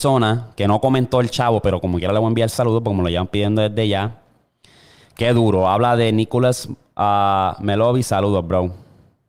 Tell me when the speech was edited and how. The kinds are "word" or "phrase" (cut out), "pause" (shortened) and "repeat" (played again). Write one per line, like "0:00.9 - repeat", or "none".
none